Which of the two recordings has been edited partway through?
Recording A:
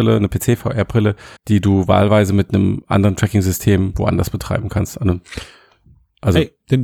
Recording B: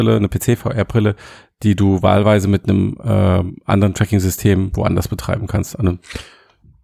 A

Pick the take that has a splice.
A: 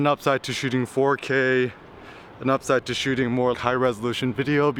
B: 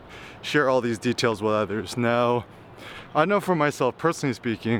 A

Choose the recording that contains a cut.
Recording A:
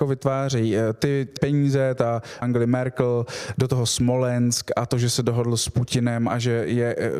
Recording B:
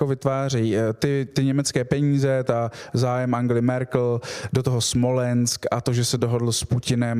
A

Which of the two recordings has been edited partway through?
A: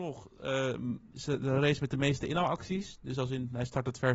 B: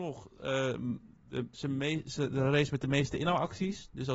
A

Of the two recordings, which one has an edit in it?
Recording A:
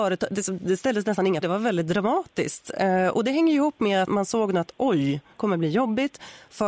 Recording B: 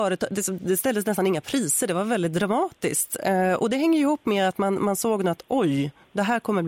A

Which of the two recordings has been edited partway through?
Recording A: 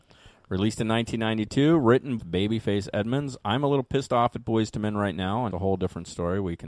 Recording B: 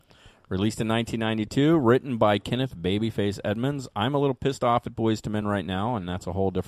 A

